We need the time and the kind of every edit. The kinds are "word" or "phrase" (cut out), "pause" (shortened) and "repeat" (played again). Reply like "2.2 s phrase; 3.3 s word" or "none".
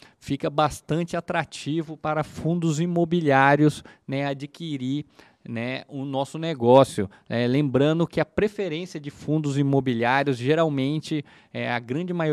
none